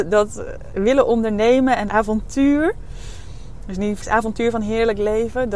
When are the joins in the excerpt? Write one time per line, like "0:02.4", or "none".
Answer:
0:01.9
0:04.0